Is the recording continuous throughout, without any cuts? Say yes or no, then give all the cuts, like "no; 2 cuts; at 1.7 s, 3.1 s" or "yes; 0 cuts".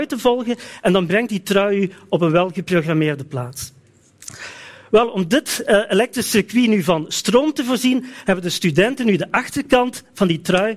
yes; 0 cuts